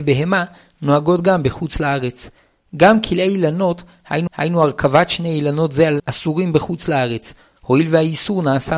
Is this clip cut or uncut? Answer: cut